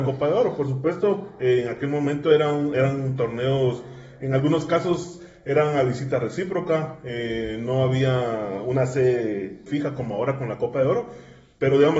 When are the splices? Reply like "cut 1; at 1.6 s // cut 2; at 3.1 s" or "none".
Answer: cut 1; at 9.7 s